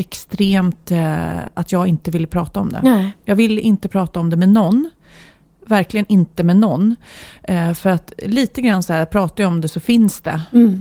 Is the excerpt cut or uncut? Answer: uncut